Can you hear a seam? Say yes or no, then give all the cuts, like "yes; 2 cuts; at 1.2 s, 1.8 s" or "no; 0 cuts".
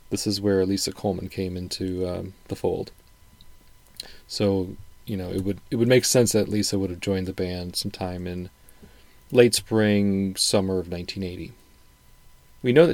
no; 0 cuts